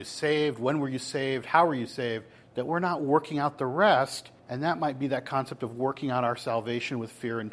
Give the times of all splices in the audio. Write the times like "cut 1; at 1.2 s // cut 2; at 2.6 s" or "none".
cut 1; at 2.4 s // cut 2; at 4.4 s